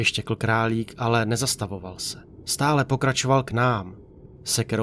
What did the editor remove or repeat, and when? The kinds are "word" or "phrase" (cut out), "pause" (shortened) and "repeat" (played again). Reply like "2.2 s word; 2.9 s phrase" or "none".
none